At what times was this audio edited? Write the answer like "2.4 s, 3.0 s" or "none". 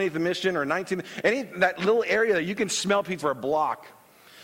3.2 s